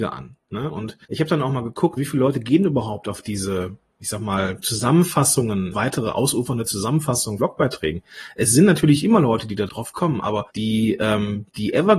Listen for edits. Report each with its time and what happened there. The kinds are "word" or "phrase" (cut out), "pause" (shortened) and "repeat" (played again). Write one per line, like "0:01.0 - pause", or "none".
0:01.0 - pause
0:02.0 - word
0:05.7 - word
0:07.4 - phrase
0:09.7 - word
0:10.5 - pause